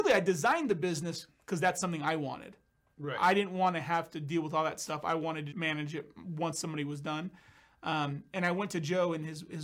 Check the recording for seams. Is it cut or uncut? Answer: cut